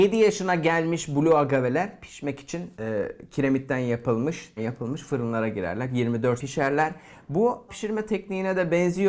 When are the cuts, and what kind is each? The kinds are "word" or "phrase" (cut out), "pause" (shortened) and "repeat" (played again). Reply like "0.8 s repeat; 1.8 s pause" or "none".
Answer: 2.7 s pause; 4.6 s word; 6.4 s word; 7.7 s word